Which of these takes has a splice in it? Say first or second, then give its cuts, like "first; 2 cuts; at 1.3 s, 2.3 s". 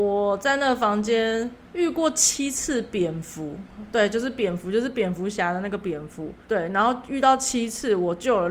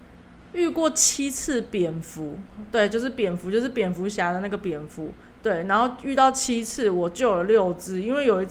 first; 2 cuts; at 1.6 s, 6.4 s